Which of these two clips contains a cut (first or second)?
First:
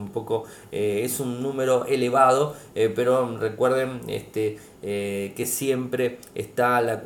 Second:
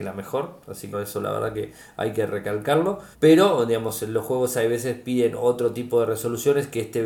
second